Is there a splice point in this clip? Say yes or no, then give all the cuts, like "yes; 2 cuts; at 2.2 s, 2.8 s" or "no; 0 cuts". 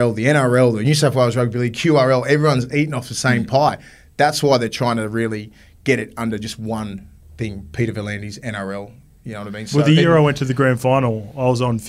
no; 0 cuts